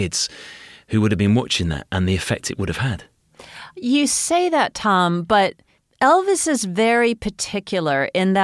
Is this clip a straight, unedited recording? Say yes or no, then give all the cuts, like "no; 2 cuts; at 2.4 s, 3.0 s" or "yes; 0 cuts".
no; 1 cut; at 5.8 s